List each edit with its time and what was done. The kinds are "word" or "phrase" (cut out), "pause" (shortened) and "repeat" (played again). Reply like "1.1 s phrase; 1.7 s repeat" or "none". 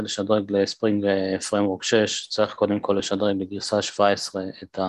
none